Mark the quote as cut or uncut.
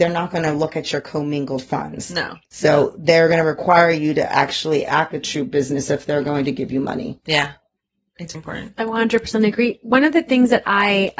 cut